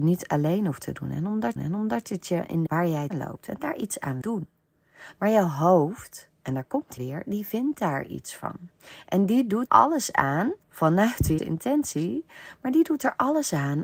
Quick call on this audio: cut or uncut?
cut